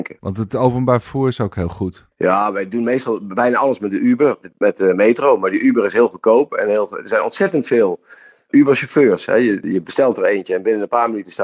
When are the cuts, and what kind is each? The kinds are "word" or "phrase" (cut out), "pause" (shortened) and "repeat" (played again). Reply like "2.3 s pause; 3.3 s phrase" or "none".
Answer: 4.4 s phrase